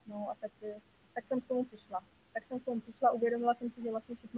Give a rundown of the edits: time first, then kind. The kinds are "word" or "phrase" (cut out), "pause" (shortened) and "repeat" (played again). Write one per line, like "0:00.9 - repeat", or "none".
none

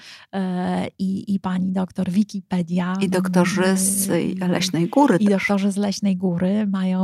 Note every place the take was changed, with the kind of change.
none

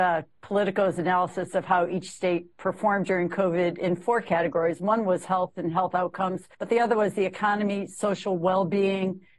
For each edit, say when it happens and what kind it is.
0:06.5 - pause

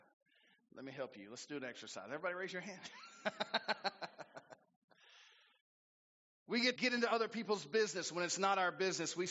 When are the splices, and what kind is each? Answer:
0:06.8 - word

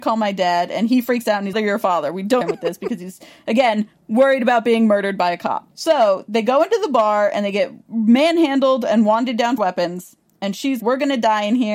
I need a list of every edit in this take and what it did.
0:01.5 - phrase
0:02.4 - phrase
0:05.7 - pause
0:07.8 - pause
0:09.6 - word
0:10.3 - pause
0:10.8 - word

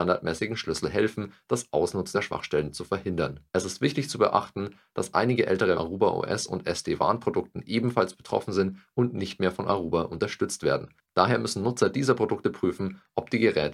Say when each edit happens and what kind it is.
0:02.1 - word
0:03.5 - pause
0:05.7 - phrase

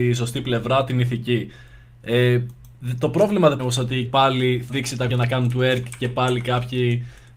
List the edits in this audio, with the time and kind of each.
0:03.6 - word
0:04.1 - word
0:04.7 - word
0:05.1 - word

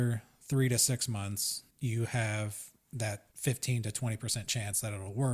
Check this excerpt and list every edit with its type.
0:01.7 - pause
0:03.3 - pause

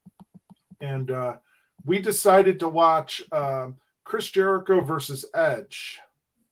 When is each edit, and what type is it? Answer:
none

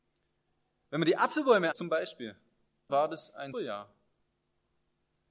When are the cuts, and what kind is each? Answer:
0:01.7 - word
0:02.9 - word
0:03.5 - word

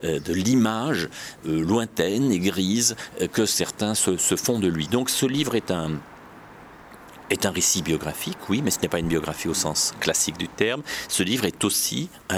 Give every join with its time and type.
0:01.4 - word

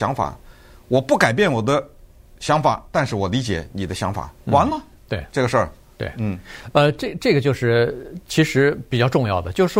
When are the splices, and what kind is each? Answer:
none

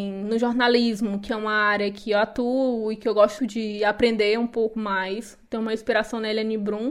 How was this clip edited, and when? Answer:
0:03.4 - word

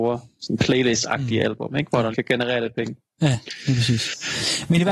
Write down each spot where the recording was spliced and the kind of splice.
0:02.1 - phrase

